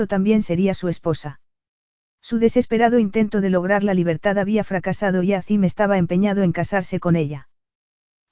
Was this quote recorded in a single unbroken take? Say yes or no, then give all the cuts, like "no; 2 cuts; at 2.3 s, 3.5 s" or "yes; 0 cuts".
yes; 0 cuts